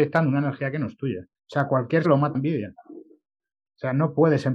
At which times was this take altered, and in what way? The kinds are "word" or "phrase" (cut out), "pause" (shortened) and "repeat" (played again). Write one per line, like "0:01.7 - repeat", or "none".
0:01.3 - pause
0:02.0 - word
0:02.3 - word